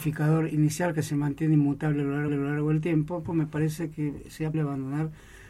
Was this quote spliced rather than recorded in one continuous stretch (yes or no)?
yes